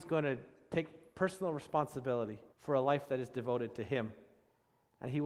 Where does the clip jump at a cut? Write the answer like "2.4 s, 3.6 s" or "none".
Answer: 2.5 s